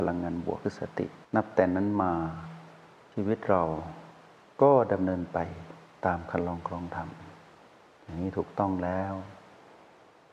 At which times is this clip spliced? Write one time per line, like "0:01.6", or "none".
0:01.2

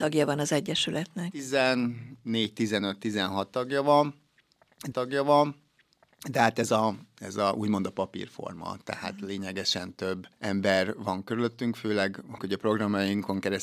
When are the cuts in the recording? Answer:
0:04.9
0:10.3
0:12.4

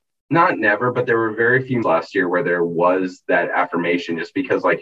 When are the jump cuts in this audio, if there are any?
0:01.8

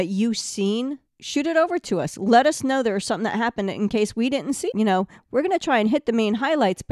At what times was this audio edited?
0:01.1
0:04.7

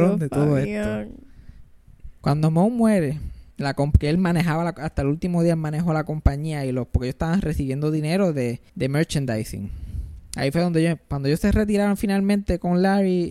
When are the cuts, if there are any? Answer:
0:02.2
0:03.5
0:08.7

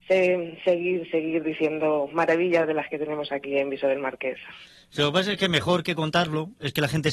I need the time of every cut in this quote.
none

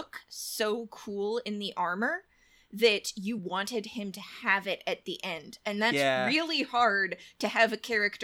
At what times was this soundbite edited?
none

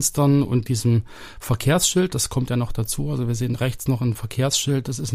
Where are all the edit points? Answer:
none

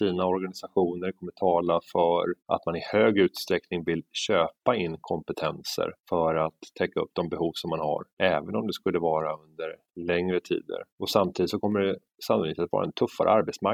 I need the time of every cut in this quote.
0:02.4
0:06.0
0:08.1
0:10.9

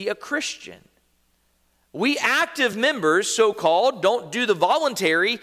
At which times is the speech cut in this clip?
none

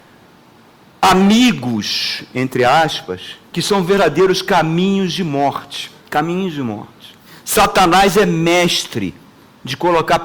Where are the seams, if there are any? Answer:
0:03.4
0:06.0
0:07.3

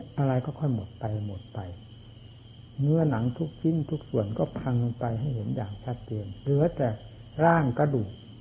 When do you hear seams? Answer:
0:02.7

